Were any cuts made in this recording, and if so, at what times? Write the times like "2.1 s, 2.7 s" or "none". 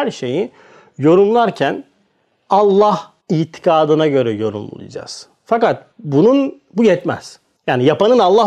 3.2 s, 5.9 s, 7.6 s